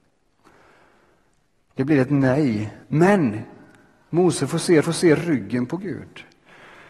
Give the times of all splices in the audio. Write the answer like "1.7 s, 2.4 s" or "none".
2.8 s, 4.8 s